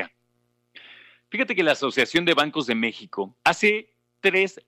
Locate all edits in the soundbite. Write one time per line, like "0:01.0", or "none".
0:03.4